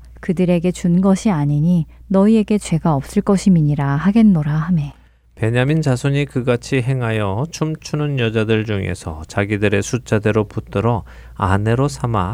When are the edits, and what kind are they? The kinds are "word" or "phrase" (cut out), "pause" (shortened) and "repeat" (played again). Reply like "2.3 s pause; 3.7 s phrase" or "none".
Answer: none